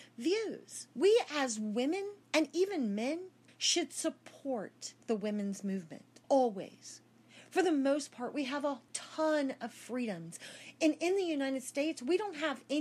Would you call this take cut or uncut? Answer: cut